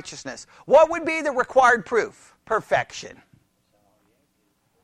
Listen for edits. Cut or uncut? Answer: cut